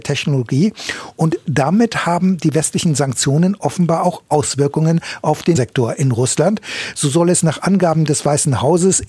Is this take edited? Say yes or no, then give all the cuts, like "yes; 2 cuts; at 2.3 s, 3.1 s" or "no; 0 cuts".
yes; 1 cut; at 5.5 s